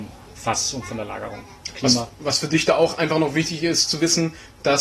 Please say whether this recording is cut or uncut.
uncut